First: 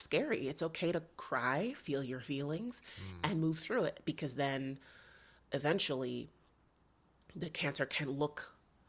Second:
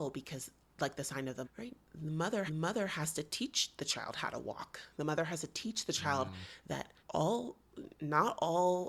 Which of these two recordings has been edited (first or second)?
second